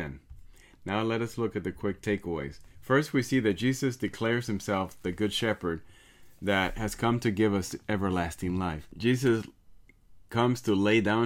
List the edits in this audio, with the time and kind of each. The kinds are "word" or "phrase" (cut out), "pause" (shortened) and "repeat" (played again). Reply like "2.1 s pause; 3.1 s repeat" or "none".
2.7 s pause